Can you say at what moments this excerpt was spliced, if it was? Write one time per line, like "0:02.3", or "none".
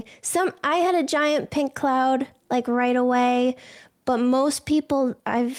none